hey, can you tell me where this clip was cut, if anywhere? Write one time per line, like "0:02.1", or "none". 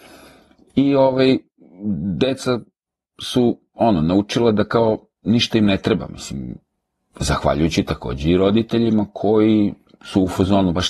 none